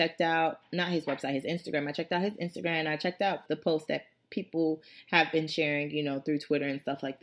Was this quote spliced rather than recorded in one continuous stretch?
yes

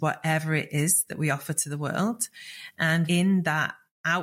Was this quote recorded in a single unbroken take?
no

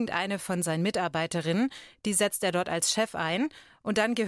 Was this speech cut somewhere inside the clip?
no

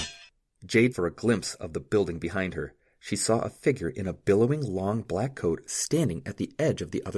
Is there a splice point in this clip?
yes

